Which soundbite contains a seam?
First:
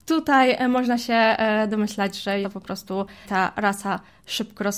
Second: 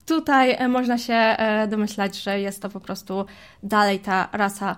first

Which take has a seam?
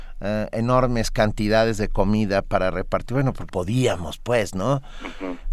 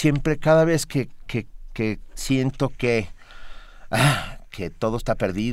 first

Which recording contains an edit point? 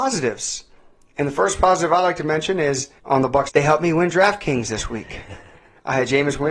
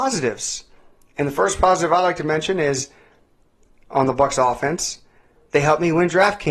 first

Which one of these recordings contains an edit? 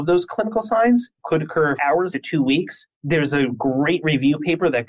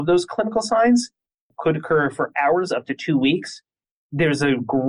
first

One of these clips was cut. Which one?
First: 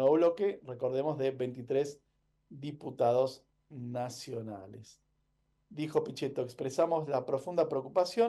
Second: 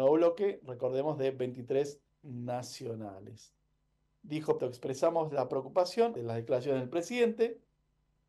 second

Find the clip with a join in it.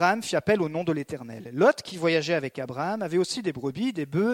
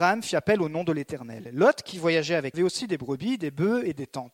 second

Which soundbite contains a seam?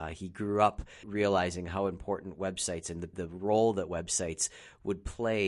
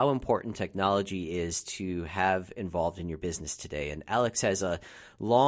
first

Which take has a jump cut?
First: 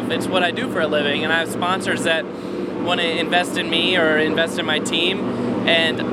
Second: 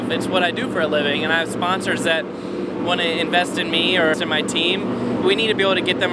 second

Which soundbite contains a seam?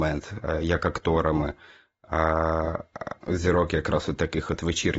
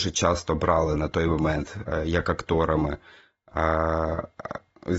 first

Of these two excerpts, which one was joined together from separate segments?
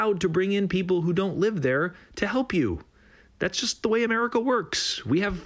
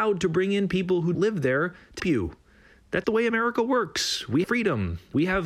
second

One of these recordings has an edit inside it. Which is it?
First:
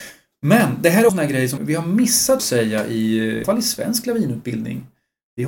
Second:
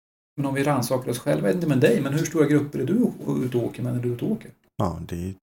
first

